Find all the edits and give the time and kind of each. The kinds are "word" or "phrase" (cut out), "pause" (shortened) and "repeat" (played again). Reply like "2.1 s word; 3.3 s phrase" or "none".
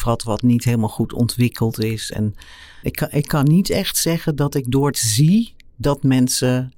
2.8 s word; 4.9 s phrase